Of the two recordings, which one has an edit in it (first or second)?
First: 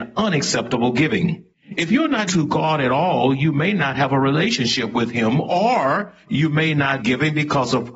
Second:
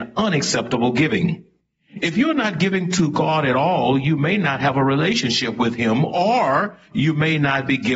first